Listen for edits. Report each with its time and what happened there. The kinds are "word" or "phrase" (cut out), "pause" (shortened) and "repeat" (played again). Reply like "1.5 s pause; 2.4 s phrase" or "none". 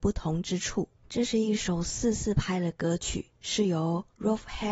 1.0 s pause

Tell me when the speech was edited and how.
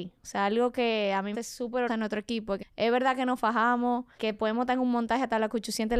1.3 s word; 1.9 s word; 2.6 s word; 4.2 s word

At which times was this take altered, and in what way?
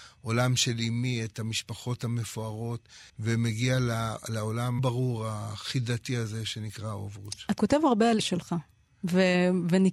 3.1 s pause; 4.8 s word; 7.6 s word; 8.2 s word

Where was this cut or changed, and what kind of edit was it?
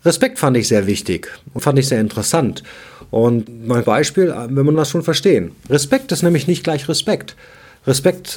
1.6 s word; 3.8 s phrase; 4.7 s phrase

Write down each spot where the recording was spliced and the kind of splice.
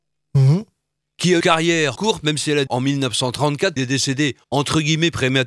1.4 s word; 2.0 s word; 2.7 s word; 3.8 s word; 4.4 s pause

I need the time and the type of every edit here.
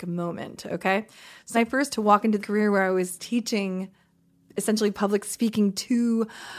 1.5 s word; 1.9 s word; 2.4 s word

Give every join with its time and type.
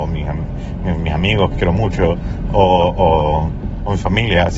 1.5 s word

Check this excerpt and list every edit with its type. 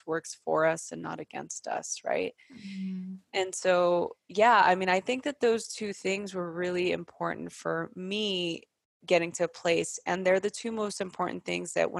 none

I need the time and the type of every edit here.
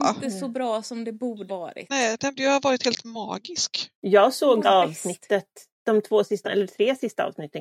1.5 s word; 2.4 s word; 4.6 s word; 6.4 s word

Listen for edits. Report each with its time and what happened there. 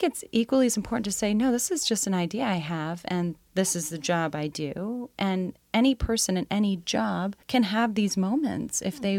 7.4 s pause

